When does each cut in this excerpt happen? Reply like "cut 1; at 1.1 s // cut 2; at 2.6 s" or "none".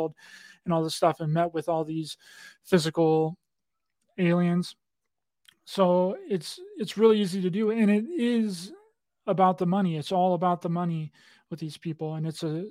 none